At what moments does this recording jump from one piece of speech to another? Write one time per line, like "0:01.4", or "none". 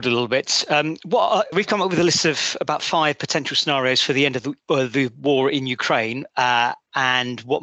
0:01.5
0:04.6